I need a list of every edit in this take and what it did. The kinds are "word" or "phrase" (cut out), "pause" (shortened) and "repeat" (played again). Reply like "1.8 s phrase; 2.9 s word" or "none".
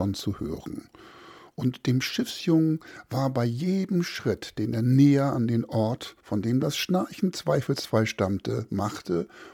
6.2 s pause